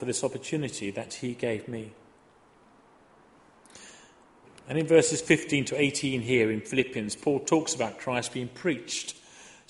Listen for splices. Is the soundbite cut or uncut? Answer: uncut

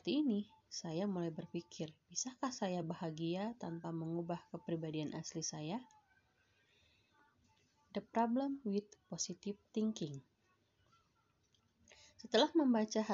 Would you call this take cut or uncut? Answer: uncut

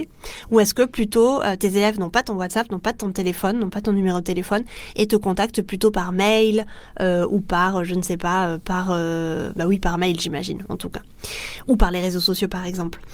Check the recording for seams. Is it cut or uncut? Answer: uncut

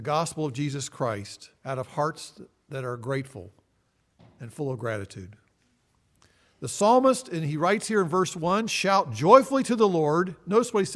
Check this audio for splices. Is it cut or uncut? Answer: cut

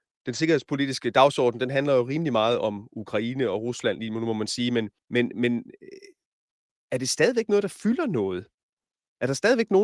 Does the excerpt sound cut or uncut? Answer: cut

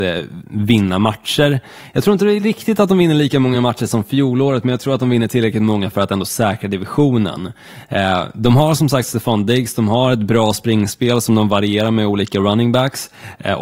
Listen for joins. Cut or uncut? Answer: uncut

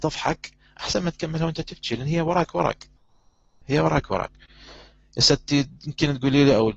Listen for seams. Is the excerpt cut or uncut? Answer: uncut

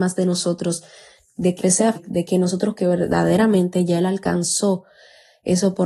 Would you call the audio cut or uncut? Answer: cut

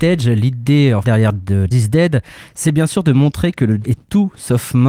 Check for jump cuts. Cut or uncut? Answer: cut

